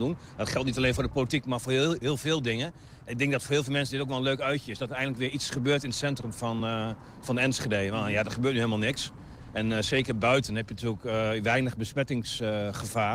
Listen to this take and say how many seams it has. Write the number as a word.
zero